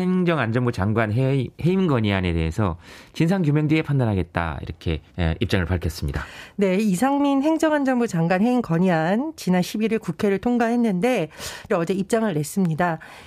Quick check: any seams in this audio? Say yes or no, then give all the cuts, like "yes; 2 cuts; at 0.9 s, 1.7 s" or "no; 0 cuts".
yes; 2 cuts; at 5.1 s, 11.7 s